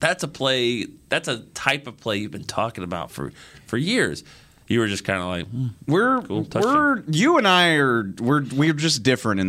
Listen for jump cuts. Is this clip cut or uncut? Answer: uncut